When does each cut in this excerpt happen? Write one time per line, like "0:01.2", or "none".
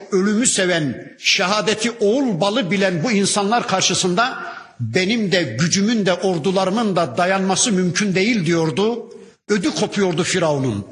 none